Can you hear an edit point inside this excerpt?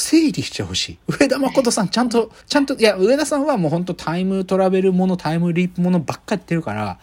yes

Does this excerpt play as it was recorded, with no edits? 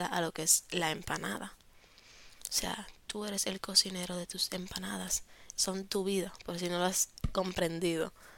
no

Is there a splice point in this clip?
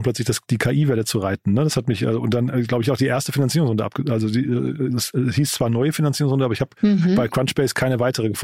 no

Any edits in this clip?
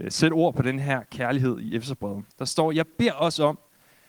yes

